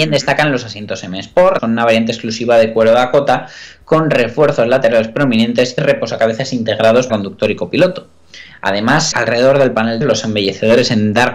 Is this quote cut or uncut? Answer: cut